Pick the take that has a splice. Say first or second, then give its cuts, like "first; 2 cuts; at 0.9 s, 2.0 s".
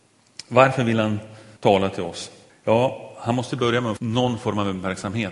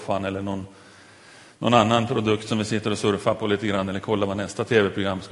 first; 3 cuts; at 1.6 s, 2.5 s, 4.0 s